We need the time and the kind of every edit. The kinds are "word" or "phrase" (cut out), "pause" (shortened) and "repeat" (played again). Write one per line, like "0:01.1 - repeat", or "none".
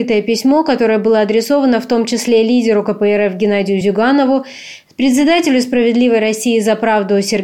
none